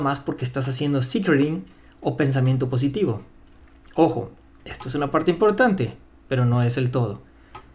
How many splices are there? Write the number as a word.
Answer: zero